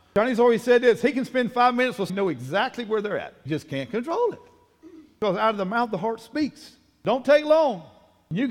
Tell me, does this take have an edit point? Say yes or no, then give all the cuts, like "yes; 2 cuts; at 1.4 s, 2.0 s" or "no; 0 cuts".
yes; 2 cuts; at 2.1 s, 3.5 s